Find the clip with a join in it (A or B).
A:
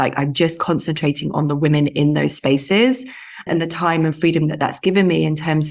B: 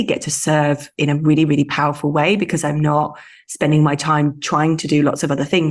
A